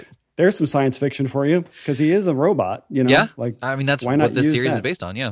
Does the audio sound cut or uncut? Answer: uncut